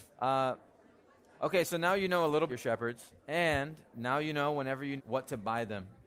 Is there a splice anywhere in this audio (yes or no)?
yes